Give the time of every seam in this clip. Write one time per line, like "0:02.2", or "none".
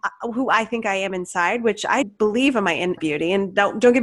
0:02.0
0:03.0

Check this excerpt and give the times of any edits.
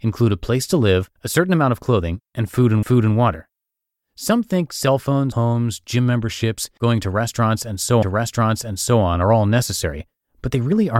0:01.2
0:02.8
0:05.3
0:06.8
0:08.0

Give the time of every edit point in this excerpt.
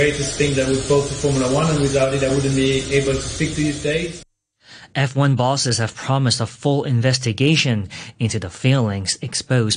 none

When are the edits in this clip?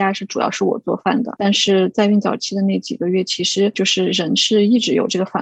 none

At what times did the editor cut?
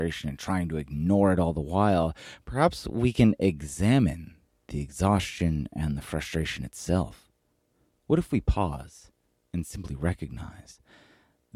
none

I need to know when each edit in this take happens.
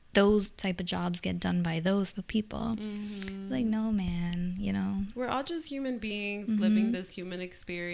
0:02.1

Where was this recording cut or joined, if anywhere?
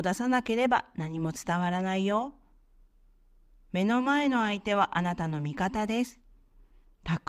none

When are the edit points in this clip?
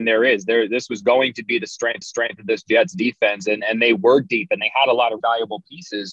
0:02.0
0:05.2

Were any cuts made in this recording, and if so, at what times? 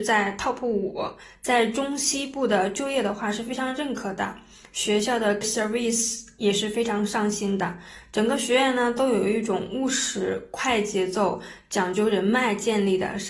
0:05.4

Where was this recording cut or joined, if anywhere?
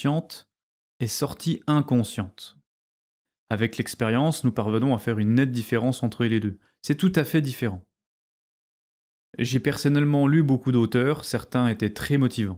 none

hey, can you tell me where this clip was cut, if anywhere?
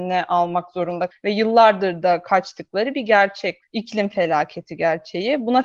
0:01.1
0:03.6

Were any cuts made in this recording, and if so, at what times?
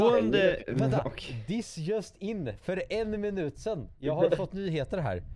none

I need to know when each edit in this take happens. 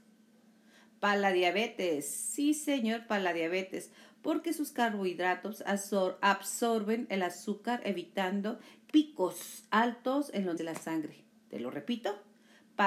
0:08.9
0:10.6

